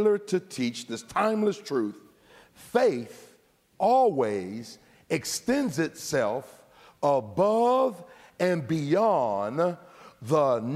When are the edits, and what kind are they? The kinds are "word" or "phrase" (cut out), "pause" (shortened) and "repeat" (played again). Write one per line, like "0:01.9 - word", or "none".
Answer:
none